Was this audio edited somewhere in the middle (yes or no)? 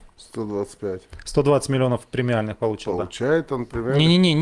no